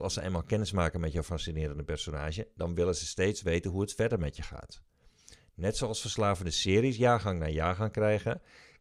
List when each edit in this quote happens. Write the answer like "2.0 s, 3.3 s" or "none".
none